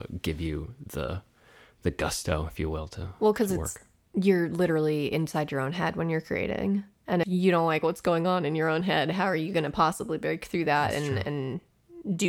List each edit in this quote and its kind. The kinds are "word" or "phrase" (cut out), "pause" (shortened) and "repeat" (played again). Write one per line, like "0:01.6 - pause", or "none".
0:07.2 - word